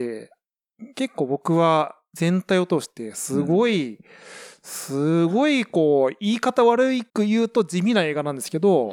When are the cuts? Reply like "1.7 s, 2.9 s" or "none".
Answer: 7.1 s